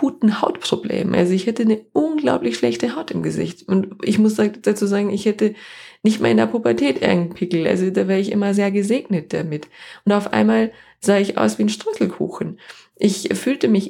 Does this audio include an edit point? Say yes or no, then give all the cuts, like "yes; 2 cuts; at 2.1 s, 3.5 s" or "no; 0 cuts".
no; 0 cuts